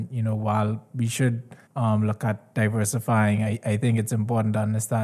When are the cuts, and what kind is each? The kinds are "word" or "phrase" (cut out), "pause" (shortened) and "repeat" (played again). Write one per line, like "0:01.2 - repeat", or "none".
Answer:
0:01.6 - pause